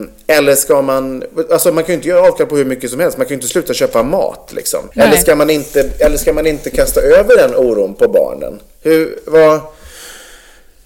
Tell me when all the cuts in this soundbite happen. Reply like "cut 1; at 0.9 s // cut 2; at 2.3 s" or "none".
cut 1; at 4.9 s